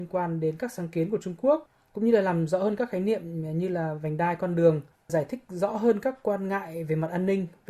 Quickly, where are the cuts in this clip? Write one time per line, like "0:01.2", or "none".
none